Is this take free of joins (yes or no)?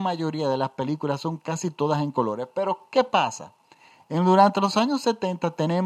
yes